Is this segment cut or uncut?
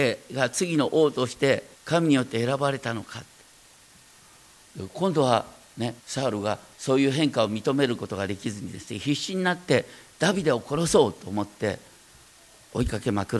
cut